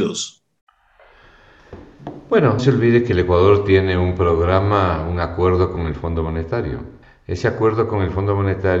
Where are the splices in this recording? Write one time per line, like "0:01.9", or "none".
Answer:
0:02.6
0:07.0